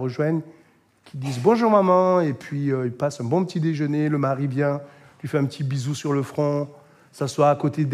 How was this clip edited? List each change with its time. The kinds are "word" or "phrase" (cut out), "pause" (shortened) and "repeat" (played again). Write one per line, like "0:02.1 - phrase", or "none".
none